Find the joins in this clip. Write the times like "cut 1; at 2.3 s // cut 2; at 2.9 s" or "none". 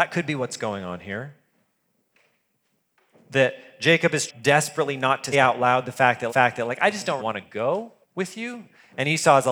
cut 1; at 4.3 s // cut 2; at 5.3 s // cut 3; at 6.3 s // cut 4; at 7.2 s // cut 5; at 8.0 s